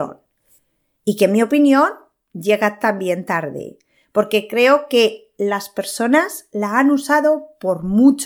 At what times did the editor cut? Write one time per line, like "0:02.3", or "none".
none